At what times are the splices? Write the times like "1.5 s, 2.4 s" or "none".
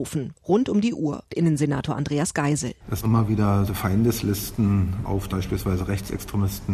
1.3 s, 3.0 s, 3.7 s, 5.3 s